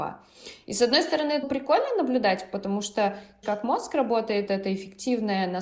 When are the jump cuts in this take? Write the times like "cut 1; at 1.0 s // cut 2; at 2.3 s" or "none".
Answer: cut 1; at 1.4 s // cut 2; at 3.4 s // cut 3; at 4.5 s